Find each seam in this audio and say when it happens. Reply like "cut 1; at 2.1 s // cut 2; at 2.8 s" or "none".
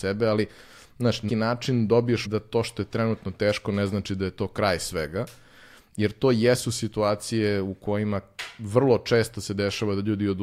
cut 1; at 1.3 s // cut 2; at 2.2 s